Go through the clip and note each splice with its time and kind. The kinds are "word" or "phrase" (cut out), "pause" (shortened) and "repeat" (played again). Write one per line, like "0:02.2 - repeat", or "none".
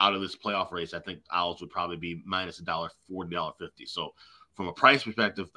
none